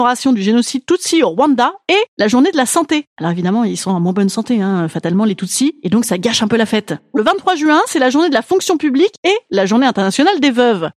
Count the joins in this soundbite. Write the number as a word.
one